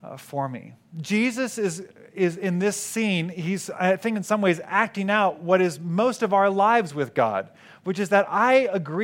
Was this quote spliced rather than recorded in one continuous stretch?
no; 0 cuts

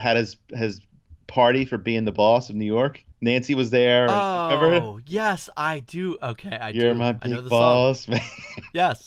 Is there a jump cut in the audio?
yes; 1 cut; at 3.1 s

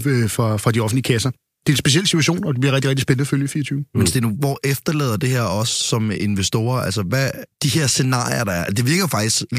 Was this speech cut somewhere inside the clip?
no; 0 cuts

